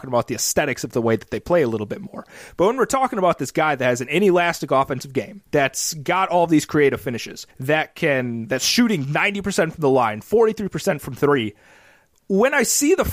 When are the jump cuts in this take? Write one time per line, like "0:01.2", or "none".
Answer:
0:05.5
0:07.5